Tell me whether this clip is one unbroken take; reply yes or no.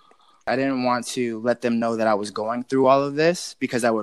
yes